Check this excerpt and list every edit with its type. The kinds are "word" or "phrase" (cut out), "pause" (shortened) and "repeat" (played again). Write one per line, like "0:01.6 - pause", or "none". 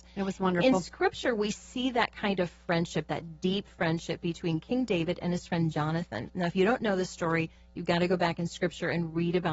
none